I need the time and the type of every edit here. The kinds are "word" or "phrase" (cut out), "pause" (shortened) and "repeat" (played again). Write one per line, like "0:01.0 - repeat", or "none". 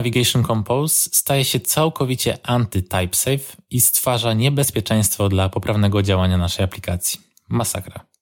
none